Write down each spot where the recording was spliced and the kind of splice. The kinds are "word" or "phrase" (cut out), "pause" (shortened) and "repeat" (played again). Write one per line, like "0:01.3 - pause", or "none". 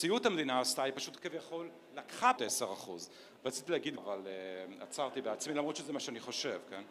0:01.2 - word
0:02.4 - word
0:04.0 - word